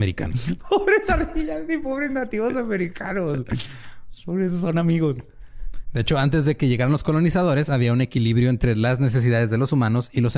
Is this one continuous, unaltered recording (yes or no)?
yes